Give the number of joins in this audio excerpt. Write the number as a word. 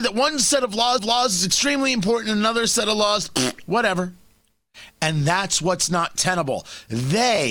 one